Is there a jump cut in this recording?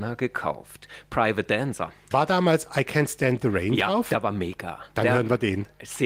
no; 0 cuts

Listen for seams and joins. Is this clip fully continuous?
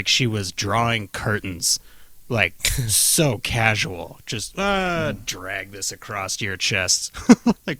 yes; 0 cuts

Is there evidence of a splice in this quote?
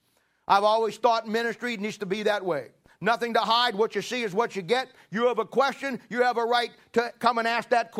no; 0 cuts

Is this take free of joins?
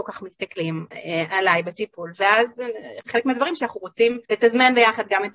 no; 3 cuts; at 0.9 s, 3.0 s, 4.2 s

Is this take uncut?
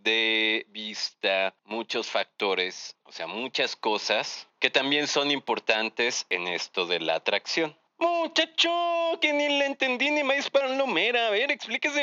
no; 1 cut; at 1.6 s

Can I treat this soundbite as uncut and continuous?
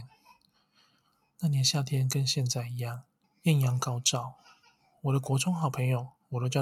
no; 1 cut; at 3.2 s

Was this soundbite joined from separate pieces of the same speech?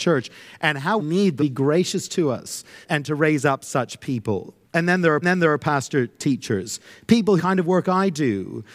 yes; 6 cuts; at 1.0 s, 1.4 s, 2.8 s, 4.6 s, 5.2 s, 7.4 s

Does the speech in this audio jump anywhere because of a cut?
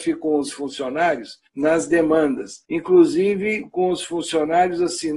yes; 2 cuts; at 1.5 s, 2.6 s

